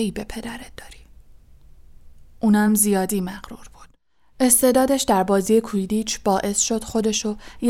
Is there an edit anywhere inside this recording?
no; 0 cuts

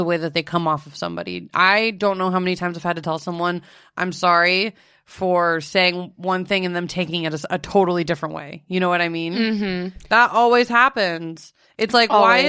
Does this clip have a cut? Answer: no; 0 cuts

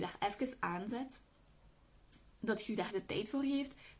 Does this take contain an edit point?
yes; 1 cut; at 2.9 s

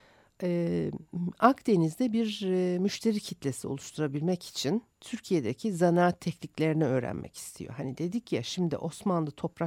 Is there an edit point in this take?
yes; 1 cut; at 4.9 s

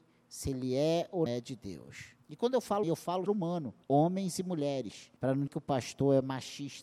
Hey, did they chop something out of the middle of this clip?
yes; 7 cuts; at 1.3 s, 2.2 s, 2.8 s, 3.3 s, 3.8 s, 5.2 s, 5.5 s

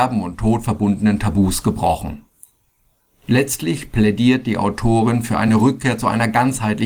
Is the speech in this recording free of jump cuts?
yes; 0 cuts

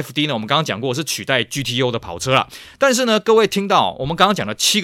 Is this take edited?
no; 0 cuts

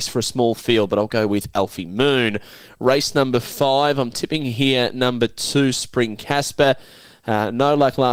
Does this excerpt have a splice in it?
no; 0 cuts

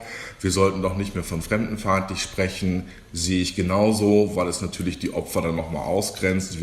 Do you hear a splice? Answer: no; 0 cuts

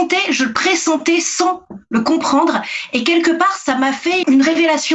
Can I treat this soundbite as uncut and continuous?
yes; 0 cuts

